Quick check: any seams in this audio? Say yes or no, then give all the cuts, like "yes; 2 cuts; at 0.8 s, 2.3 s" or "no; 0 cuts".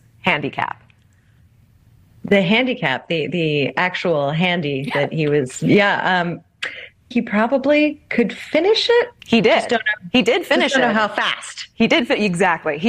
yes; 2 cuts; at 7.1 s, 9.2 s